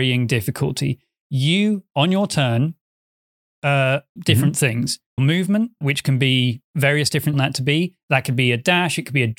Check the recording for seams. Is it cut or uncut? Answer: cut